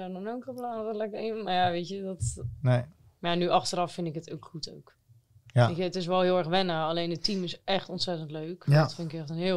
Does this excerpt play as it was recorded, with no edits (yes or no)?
yes